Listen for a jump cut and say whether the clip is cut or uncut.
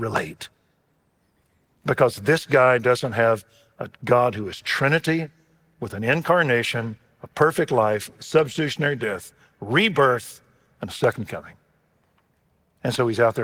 uncut